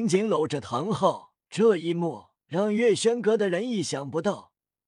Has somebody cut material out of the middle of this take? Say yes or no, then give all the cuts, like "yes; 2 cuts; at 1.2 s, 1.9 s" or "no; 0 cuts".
yes; 2 cuts; at 1.4 s, 2.4 s